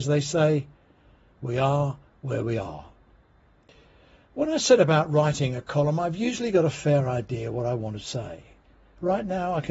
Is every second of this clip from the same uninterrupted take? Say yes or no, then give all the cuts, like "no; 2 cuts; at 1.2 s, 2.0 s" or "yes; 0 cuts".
yes; 0 cuts